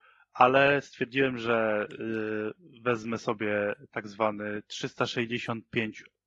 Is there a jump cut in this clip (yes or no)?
no